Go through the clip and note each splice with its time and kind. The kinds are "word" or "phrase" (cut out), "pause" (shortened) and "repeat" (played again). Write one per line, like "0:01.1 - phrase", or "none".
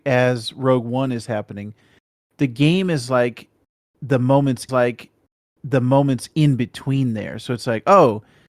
0:04.7 - repeat